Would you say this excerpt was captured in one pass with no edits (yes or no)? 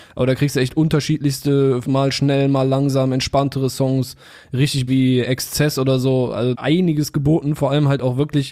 no